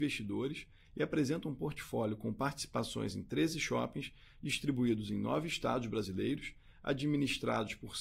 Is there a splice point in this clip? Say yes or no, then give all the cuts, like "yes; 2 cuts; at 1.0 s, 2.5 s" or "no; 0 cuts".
no; 0 cuts